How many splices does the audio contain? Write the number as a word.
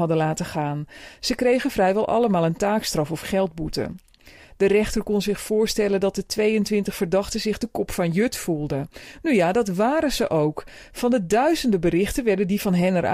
zero